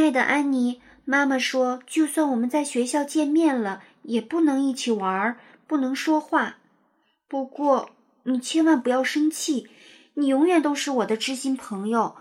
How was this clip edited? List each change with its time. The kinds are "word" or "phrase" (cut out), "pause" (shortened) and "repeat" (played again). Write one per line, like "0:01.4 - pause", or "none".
none

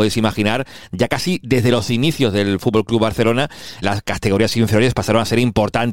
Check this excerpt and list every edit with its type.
0:03.8 - word

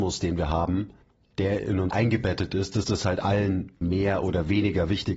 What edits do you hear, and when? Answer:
0:01.0 - pause
0:01.9 - word
0:02.8 - word
0:03.8 - word

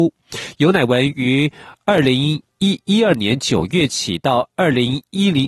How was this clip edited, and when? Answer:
0:02.5 - pause

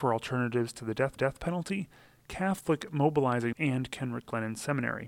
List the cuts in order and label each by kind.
0:01.2 - repeat
0:03.5 - word

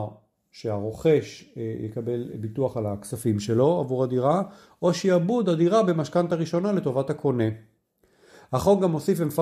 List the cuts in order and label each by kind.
none

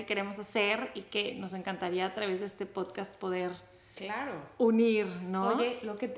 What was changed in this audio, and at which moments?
none

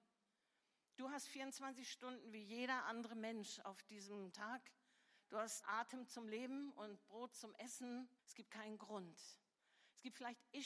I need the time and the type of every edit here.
0:04.3 - phrase
0:05.6 - word
0:08.2 - pause

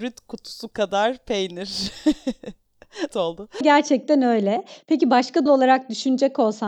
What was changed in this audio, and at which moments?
0:03.1 - word
0:03.6 - phrase
0:05.5 - word

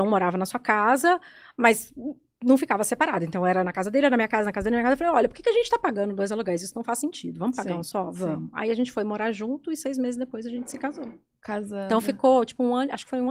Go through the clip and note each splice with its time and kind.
none

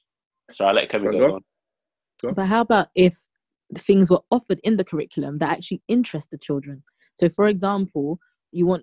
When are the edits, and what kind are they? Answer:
none

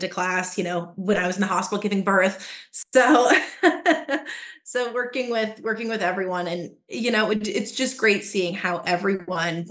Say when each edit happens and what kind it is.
none

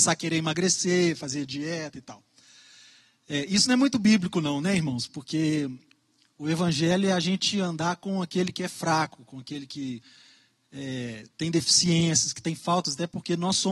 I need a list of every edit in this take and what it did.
none

